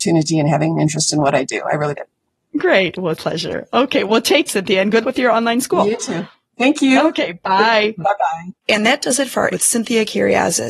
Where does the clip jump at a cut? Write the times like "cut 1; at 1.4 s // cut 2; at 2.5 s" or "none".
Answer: cut 1; at 1.9 s // cut 2; at 3.1 s // cut 3; at 4.5 s // cut 4; at 5.0 s // cut 5; at 8.6 s // cut 6; at 9.5 s